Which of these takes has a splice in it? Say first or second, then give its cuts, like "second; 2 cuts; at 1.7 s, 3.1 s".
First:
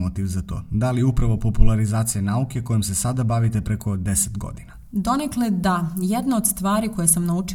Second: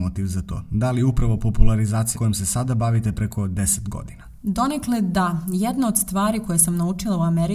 second; 1 cut; at 2.1 s